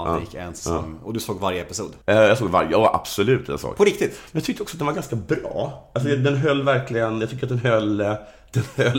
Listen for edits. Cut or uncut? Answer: cut